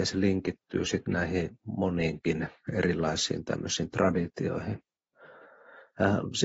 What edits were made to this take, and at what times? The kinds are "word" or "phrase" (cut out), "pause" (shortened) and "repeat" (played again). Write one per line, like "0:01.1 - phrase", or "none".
none